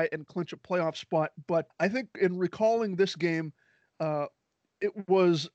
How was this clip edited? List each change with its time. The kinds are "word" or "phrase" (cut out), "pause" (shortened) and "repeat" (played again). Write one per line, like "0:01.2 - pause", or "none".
0:01.7 - word